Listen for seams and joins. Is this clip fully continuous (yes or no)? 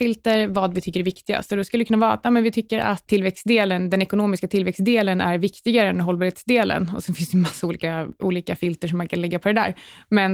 no